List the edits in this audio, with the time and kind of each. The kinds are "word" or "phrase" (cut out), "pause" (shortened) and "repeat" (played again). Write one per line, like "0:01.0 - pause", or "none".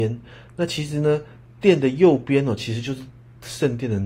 none